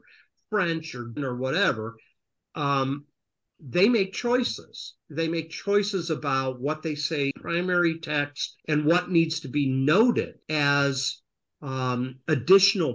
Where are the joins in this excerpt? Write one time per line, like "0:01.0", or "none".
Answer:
0:01.2
0:07.3
0:08.6
0:10.4